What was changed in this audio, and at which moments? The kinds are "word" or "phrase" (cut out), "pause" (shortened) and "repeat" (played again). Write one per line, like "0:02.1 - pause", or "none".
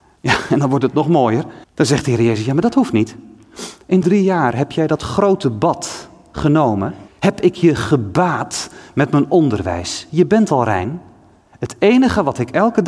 0:01.6 - pause
0:04.0 - word
0:07.1 - pause